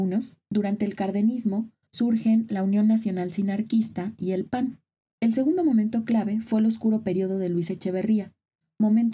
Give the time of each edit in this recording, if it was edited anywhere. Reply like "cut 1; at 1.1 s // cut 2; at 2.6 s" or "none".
none